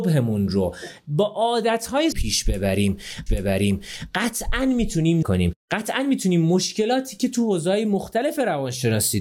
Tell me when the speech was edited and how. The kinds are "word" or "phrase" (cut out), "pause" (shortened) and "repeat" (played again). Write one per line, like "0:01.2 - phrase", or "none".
0:02.1 - phrase
0:03.3 - repeat
0:05.2 - phrase